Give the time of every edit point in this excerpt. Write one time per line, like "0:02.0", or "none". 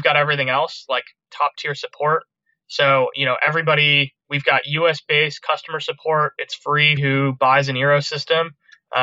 0:04.2
0:07.0